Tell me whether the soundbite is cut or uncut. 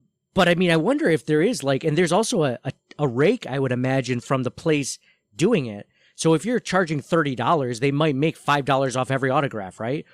uncut